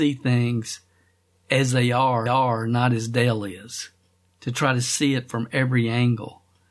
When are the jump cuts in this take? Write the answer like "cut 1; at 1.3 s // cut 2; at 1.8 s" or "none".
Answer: cut 1; at 2.3 s

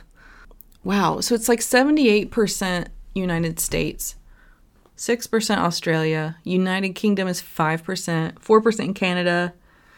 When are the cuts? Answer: none

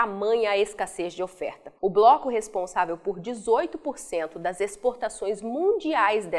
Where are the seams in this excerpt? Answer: cut 1; at 1.8 s

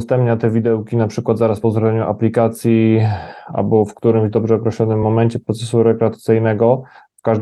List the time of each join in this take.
none

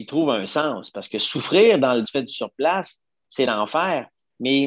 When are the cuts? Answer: cut 1; at 2.0 s

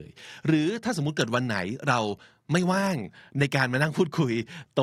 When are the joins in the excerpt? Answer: none

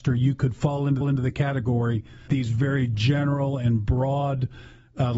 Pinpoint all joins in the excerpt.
cut 1; at 1.0 s // cut 2; at 2.3 s

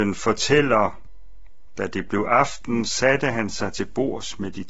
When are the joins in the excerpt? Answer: none

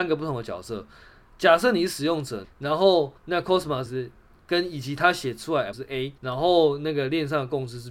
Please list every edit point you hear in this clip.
cut 1; at 2.4 s // cut 2; at 3.2 s // cut 3; at 3.9 s // cut 4; at 5.7 s // cut 5; at 6.2 s

